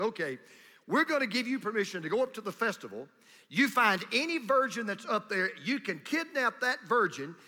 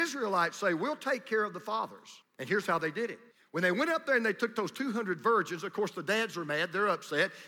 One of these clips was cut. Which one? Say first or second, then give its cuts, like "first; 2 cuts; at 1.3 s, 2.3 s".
second; 2 cuts; at 2.2 s, 3.3 s